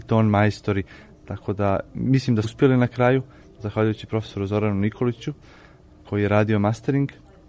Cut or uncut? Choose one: cut